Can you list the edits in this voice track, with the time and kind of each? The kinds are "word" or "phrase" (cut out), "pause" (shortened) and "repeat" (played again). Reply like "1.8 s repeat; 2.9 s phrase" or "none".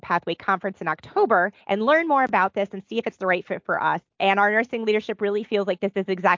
1.6 s pause; 4.1 s pause